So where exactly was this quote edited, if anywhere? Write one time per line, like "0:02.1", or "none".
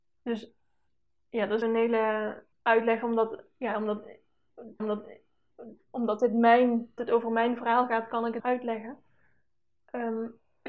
0:01.6
0:02.5
0:04.8
0:07.0
0:08.4